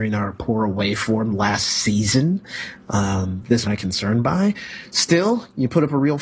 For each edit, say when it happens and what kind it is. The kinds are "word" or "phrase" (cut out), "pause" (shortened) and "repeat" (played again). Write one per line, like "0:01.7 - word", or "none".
0:03.7 - phrase